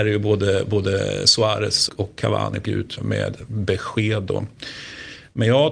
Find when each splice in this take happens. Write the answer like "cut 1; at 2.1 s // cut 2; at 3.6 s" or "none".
cut 1; at 1.9 s // cut 2; at 2.6 s // cut 3; at 3.0 s